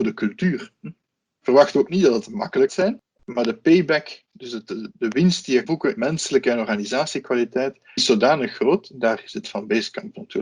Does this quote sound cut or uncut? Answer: cut